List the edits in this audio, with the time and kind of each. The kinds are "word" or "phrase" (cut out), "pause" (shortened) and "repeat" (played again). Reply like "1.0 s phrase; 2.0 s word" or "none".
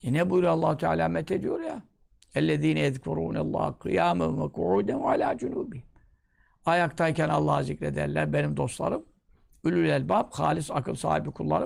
none

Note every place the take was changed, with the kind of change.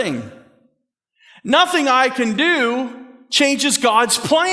none

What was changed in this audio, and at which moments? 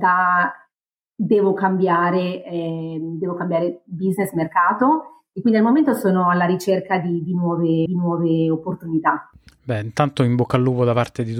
7.9 s repeat

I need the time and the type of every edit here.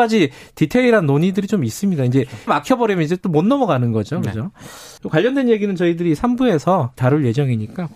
2.5 s word; 5.0 s pause; 7.0 s phrase

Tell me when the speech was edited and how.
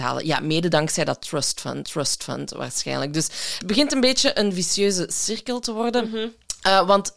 1.8 s repeat; 3.6 s word

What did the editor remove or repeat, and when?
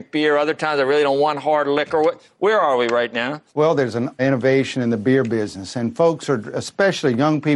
3.5 s pause; 4.2 s phrase

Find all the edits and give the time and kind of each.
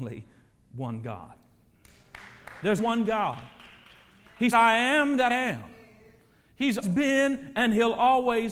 2.8 s word; 4.5 s word; 5.3 s word; 6.8 s word

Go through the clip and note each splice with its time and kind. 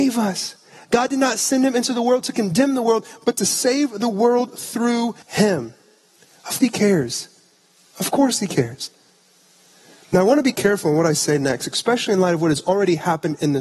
5.2 s pause; 6.6 s word

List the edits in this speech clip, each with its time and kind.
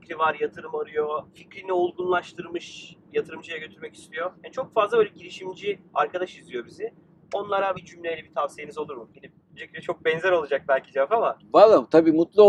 1.3 s pause; 3.1 s word; 4.3 s pause; 5.9 s pause; 7.7 s word; 9.1 s pause; 9.6 s word

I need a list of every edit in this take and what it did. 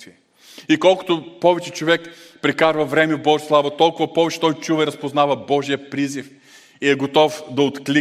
none

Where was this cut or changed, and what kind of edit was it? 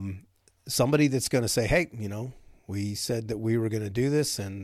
none

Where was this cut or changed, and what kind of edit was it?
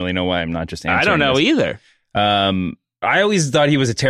3.0 s word

